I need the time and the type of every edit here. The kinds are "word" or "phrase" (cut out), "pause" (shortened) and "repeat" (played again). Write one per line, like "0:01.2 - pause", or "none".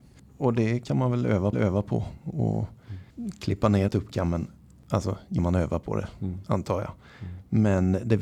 0:01.5 - repeat
0:03.1 - pause
0:03.9 - phrase
0:05.4 - word